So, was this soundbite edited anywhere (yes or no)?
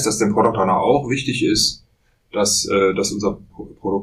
no